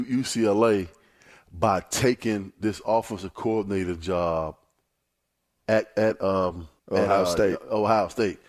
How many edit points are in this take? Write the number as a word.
one